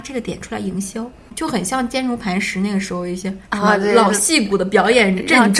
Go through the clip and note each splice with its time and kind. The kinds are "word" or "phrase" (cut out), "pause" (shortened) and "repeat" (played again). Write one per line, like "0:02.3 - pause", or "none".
0:03.4 - pause